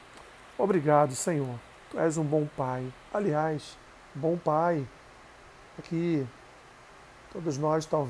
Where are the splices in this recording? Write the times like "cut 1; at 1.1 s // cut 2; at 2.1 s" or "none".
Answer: cut 1; at 1.7 s // cut 2; at 3.8 s // cut 3; at 5.8 s